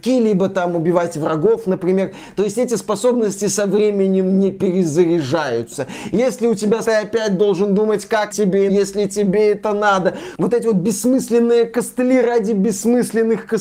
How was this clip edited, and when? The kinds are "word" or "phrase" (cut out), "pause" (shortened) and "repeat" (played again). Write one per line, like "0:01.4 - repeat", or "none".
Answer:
0:06.8 - phrase
0:08.3 - word
0:08.7 - word